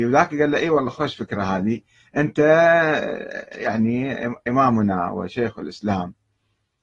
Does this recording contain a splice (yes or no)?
no